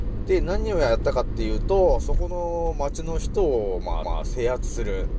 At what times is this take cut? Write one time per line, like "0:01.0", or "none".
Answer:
0:04.0